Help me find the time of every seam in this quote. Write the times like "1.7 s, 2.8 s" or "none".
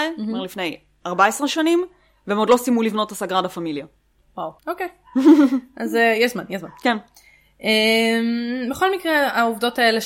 4.6 s